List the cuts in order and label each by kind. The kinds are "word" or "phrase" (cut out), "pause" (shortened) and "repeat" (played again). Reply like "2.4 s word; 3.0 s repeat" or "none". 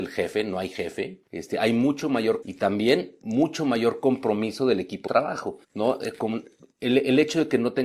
2.4 s word; 5.1 s word; 5.6 s pause